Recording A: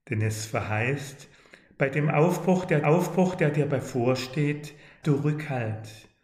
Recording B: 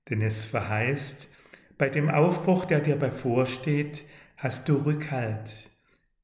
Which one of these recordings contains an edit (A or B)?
A